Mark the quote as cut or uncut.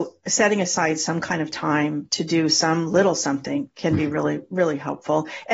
uncut